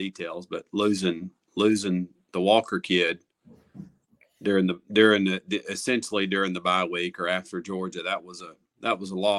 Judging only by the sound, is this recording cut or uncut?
cut